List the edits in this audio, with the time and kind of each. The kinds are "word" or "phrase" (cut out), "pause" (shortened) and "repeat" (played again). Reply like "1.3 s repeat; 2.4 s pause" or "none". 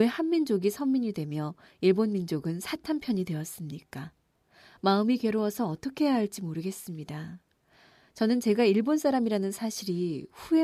none